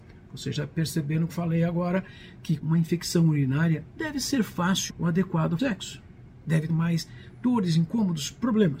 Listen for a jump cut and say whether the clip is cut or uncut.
cut